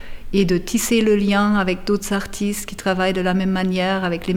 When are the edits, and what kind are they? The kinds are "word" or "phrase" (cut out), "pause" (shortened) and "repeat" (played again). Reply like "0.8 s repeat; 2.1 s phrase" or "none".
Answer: none

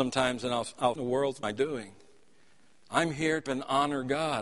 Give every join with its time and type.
1.0 s phrase; 1.4 s word; 3.5 s word

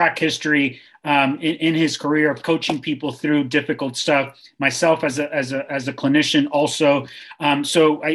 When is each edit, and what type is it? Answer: none

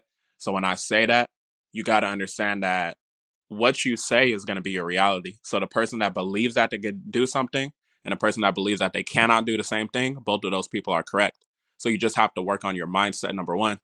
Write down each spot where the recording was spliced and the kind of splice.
none

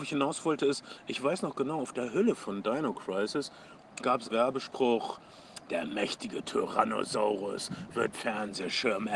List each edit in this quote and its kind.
4.0 s word; 4.3 s word; 8.1 s word

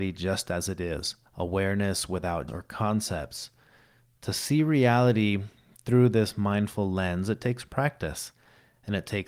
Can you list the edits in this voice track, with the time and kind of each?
1.3 s pause; 2.5 s word

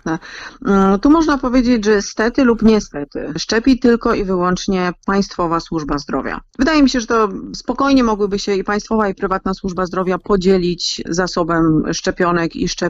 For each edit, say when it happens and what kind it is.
none

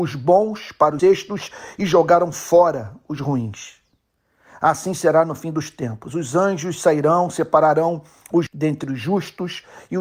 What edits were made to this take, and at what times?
1.0 s word; 8.5 s word

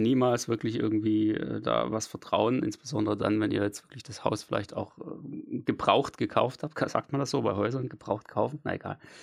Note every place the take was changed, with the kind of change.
none

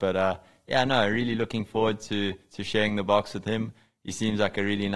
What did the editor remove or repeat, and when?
none

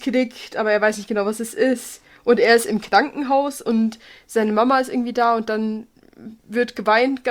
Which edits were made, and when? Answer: none

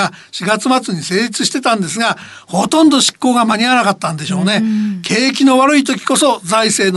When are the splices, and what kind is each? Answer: none

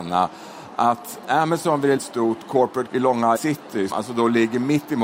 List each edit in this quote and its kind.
1.2 s word; 2.0 s word; 2.9 s word; 3.4 s word; 3.9 s word

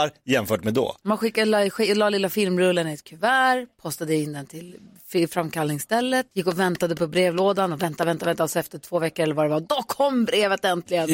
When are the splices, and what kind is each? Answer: 6.3 s pause

